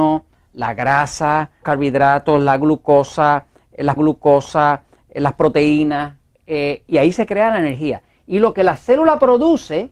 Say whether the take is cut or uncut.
cut